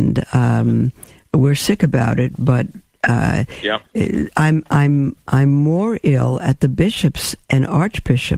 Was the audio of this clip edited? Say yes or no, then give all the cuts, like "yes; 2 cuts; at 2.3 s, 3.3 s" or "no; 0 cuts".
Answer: no; 0 cuts